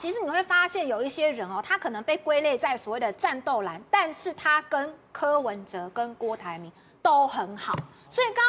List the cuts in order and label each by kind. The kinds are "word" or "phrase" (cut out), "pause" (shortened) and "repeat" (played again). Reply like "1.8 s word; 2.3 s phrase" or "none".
none

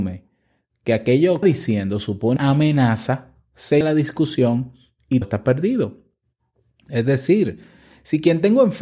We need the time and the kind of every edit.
1.4 s phrase; 2.4 s word; 3.8 s word; 5.2 s word

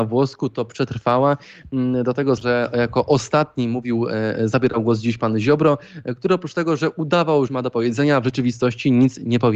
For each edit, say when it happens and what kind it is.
2.4 s word; 7.5 s phrase

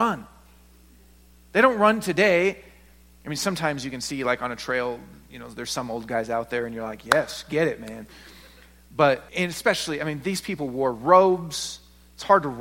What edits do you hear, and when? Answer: 9.3 s pause

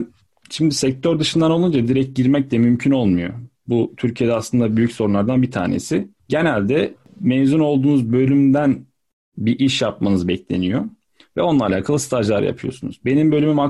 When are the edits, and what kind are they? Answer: none

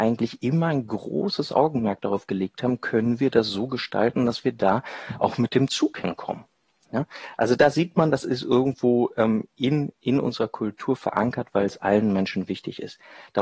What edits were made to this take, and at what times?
none

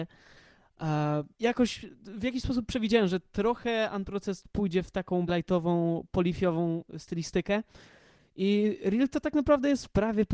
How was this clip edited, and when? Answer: 1.3 s pause; 5.3 s word

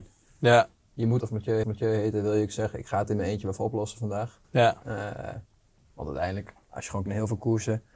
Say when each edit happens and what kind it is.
1.2 s phrase; 1.6 s repeat; 4.4 s pause; 7.1 s word

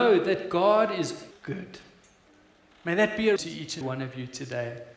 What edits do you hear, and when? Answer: 1.3 s word; 3.4 s word; 3.8 s word

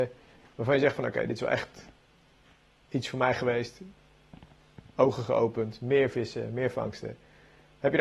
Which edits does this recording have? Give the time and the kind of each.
none

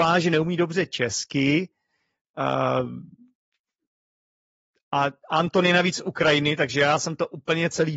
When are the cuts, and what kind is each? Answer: none

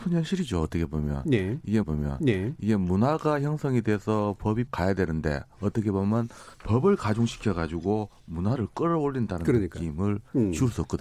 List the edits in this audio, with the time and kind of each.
1.8 s repeat; 4.7 s phrase; 6.5 s pause

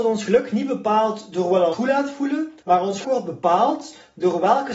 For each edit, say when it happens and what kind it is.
1.7 s word; 2.6 s pause; 3.0 s word

